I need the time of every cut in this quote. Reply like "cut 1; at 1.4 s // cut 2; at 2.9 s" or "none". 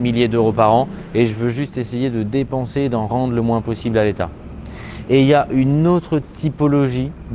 none